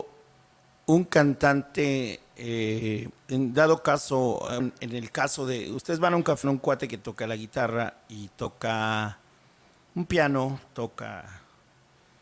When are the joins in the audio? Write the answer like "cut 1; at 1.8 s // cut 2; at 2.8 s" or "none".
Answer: cut 1; at 3.2 s // cut 2; at 4.6 s // cut 3; at 6.4 s